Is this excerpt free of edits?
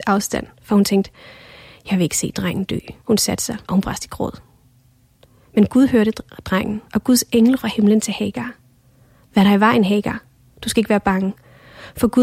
no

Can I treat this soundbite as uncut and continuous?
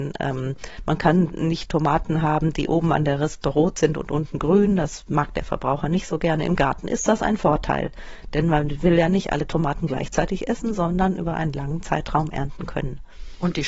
yes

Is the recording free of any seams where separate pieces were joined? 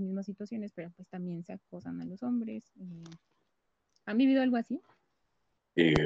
yes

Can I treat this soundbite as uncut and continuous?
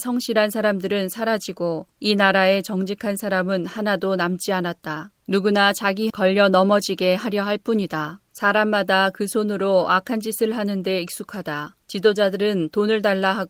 no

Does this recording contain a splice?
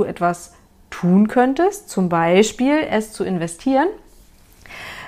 no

